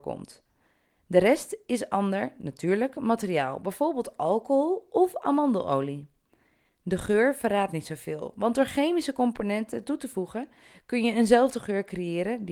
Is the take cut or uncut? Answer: uncut